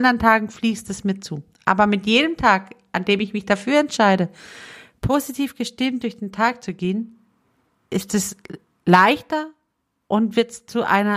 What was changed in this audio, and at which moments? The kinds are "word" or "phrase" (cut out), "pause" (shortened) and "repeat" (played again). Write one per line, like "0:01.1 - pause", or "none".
none